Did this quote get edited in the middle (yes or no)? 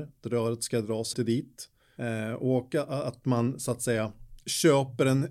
yes